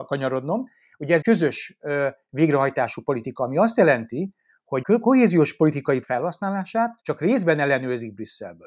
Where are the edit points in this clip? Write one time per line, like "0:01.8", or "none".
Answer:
0:01.2
0:04.8
0:06.0
0:07.0